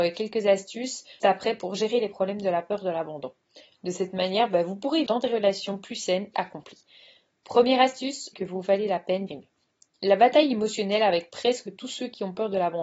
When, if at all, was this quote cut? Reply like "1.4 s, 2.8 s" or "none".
1.2 s, 5.1 s, 6.3 s, 8.3 s, 9.3 s